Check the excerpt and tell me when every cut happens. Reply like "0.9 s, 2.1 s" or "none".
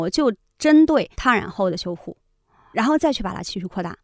1.1 s, 2.7 s